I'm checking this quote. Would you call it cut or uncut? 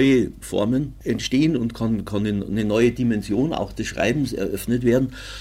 uncut